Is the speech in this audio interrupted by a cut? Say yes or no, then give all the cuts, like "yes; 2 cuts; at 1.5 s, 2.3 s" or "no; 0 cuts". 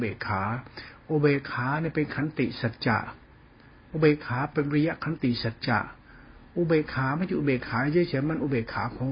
no; 0 cuts